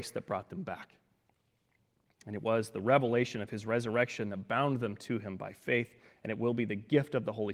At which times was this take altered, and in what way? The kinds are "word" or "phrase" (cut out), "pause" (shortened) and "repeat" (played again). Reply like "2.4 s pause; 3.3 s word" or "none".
none

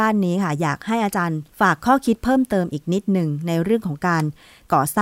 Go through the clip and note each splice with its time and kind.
1.5 s pause

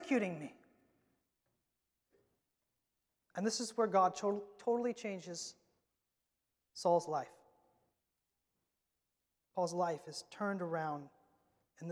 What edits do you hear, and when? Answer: none

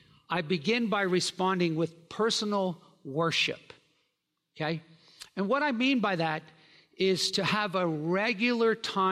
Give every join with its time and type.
none

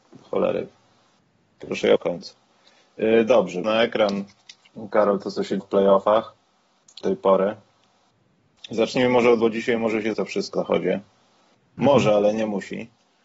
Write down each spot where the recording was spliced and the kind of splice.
2.0 s word; 3.6 s word; 5.6 s word; 7.0 s word; 9.4 s word; 10.1 s word; 10.5 s word

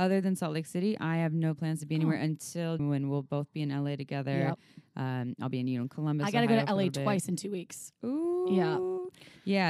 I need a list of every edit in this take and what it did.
2.8 s word

